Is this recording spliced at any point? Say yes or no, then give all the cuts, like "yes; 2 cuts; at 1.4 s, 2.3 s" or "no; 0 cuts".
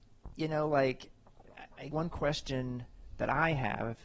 yes; 1 cut; at 1.9 s